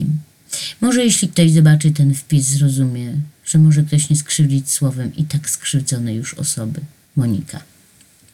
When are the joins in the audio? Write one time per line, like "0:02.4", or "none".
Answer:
none